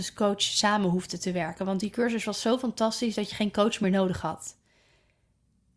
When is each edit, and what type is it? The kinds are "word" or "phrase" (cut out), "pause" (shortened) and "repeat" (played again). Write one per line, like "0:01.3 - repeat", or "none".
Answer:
none